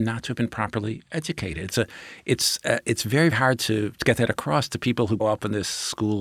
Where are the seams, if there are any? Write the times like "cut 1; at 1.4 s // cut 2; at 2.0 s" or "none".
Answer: cut 1; at 3.3 s // cut 2; at 5.2 s